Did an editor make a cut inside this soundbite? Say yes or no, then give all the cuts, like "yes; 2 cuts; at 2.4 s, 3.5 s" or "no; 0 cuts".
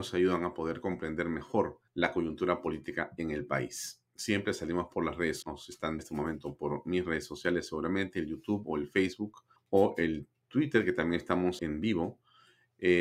yes; 5 cuts; at 1.9 s, 5.4 s, 6.0 s, 9.6 s, 11.6 s